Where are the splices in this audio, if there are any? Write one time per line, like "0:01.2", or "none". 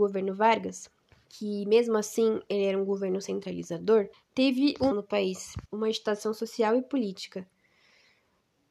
0:01.1
0:04.1
0:04.9
0:05.7